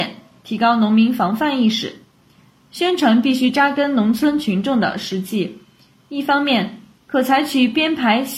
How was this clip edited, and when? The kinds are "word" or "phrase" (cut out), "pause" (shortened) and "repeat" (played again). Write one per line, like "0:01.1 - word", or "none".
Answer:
none